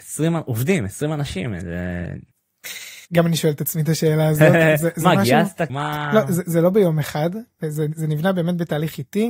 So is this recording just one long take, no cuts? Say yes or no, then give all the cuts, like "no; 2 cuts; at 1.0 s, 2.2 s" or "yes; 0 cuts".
no; 2 cuts; at 3.0 s, 5.7 s